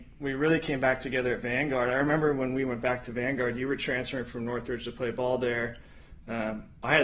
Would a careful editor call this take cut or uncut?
uncut